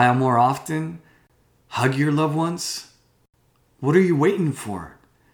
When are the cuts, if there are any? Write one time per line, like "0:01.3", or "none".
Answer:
none